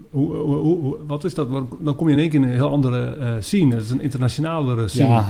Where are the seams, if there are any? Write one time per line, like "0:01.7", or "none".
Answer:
none